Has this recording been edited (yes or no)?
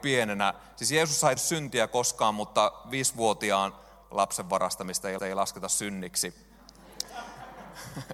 yes